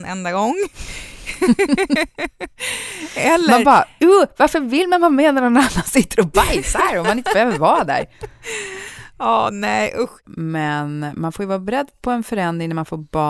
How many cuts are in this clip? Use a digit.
0